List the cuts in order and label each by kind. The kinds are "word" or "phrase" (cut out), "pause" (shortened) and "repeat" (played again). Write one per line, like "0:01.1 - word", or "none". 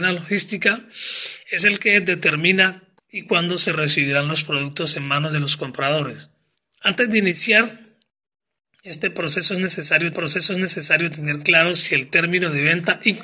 0:03.0 - word
0:06.5 - pause
0:10.1 - repeat